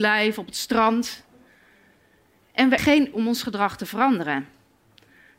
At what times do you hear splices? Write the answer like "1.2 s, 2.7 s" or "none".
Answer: 2.8 s, 3.1 s